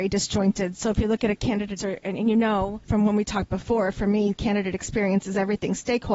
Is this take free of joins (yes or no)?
no